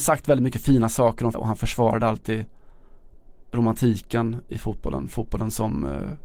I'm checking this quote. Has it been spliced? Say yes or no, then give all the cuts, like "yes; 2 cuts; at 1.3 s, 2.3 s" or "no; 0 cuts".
yes; 2 cuts; at 1.3 s, 4.5 s